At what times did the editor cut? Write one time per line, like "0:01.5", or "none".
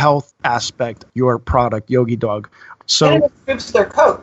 0:01.1